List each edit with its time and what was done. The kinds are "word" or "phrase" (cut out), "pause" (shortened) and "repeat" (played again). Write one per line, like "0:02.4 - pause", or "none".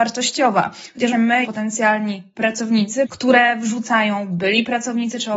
0:01.1 - word
0:01.4 - word
0:03.0 - phrase